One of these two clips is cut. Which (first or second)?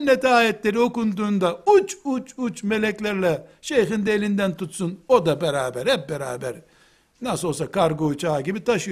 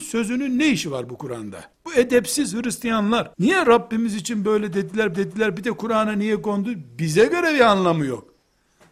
second